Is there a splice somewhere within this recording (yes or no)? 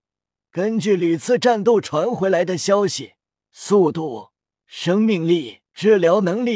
yes